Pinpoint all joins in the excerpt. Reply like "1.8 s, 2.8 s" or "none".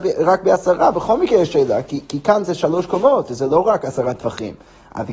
none